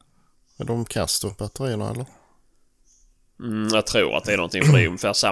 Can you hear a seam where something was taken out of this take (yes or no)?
no